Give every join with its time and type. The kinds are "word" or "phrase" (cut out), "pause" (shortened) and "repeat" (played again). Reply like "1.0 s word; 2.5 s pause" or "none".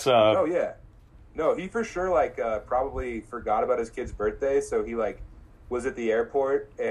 none